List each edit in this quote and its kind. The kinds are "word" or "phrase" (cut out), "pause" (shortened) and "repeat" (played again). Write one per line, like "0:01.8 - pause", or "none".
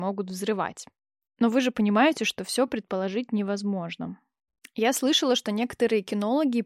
none

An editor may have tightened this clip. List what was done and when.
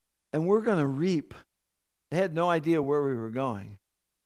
none

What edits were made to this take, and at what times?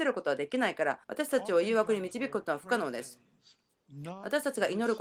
0:01.0 - pause

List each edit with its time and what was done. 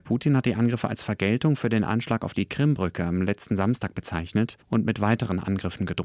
0:04.6 - pause

